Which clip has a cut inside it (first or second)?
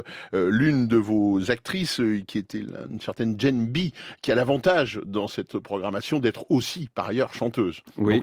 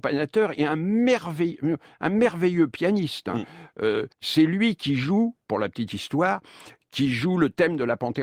second